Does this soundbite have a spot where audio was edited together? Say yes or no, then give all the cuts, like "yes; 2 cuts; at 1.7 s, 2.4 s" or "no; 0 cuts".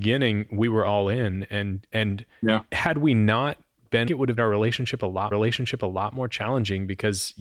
yes; 3 cuts; at 4.1 s, 4.4 s, 5.3 s